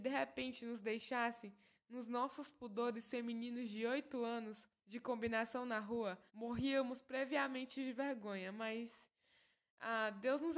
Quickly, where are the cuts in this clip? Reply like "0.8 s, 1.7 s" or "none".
4.8 s, 6.3 s